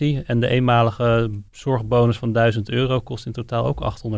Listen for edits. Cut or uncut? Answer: cut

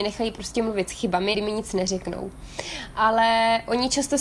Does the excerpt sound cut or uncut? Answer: cut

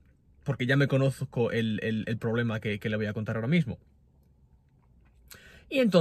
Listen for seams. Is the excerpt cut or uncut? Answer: uncut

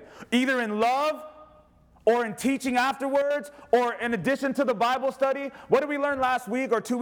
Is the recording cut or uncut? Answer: uncut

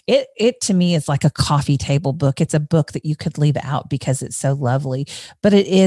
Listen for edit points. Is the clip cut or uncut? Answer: uncut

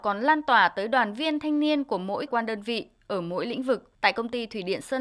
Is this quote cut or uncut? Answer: cut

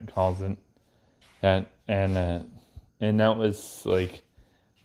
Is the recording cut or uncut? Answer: cut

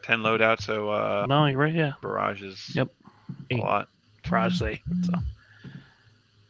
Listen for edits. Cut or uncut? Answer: cut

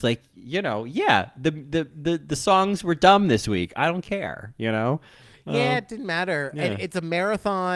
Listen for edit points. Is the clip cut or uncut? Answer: uncut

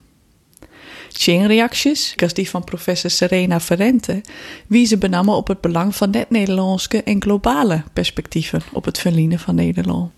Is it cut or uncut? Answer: cut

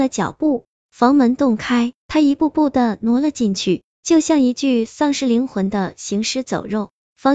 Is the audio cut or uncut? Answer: cut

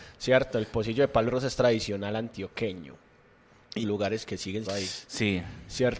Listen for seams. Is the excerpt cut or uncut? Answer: cut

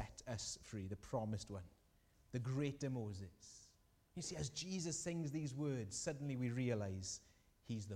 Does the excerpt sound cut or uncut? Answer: uncut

